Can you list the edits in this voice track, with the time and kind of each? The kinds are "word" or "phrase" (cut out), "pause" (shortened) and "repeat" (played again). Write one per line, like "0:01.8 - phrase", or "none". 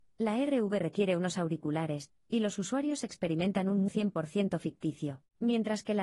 0:03.9 - word